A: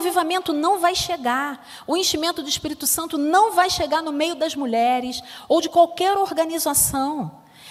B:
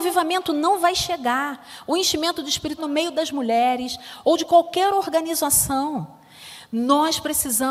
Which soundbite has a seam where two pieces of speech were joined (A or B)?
B